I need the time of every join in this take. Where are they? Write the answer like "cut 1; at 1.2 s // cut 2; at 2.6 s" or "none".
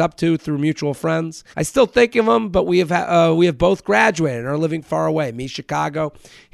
cut 1; at 1.5 s